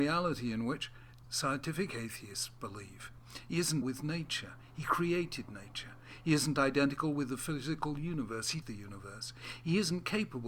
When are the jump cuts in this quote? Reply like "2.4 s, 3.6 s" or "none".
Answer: 1.2 s, 3.8 s, 8.6 s

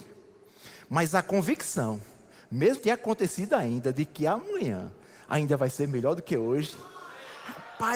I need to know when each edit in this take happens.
2.8 s

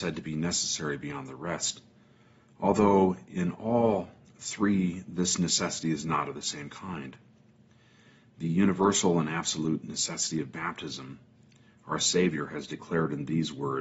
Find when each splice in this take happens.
none

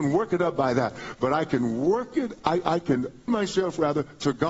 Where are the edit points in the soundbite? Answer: 3.3 s

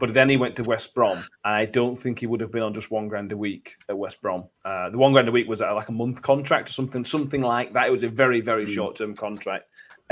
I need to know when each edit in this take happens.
1.3 s, 4.5 s

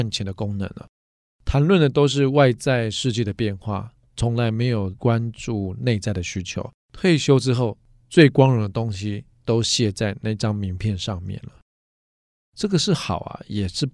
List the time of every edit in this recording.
6.8 s

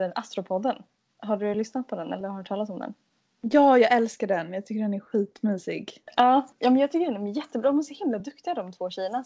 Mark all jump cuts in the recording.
none

